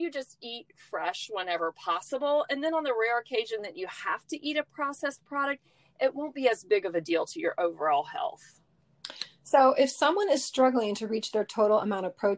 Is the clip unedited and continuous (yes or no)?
yes